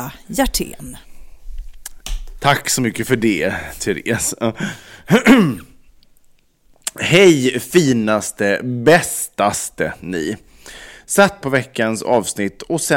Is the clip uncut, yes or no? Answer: no